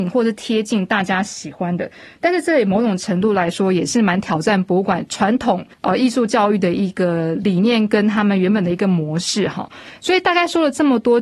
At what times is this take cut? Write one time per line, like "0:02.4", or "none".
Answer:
0:05.7